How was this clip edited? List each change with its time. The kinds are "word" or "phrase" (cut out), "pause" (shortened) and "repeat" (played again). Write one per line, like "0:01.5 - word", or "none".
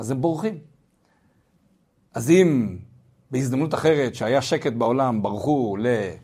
none